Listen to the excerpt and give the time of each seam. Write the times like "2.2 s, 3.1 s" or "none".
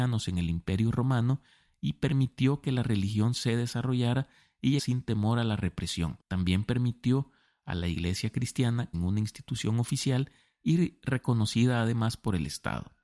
4.8 s, 8.9 s